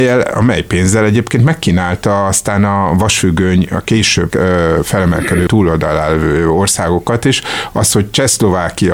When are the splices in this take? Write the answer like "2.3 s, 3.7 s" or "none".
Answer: 4.3 s, 5.5 s